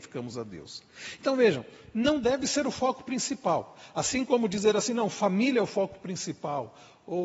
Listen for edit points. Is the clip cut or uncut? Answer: uncut